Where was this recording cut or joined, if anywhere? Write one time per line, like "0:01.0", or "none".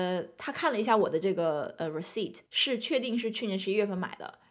0:02.5